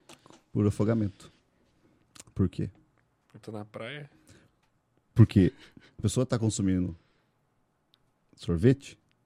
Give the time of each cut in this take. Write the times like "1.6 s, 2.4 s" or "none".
3.4 s, 6.0 s